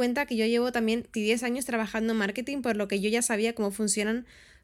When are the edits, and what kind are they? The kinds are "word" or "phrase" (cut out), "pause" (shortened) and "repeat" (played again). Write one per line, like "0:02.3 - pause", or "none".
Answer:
0:01.1 - word